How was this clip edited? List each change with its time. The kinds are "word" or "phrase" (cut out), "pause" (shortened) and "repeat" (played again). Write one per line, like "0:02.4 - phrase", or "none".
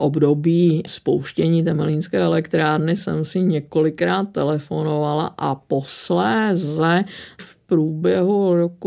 none